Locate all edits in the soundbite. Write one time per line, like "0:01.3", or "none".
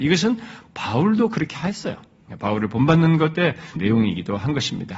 0:03.8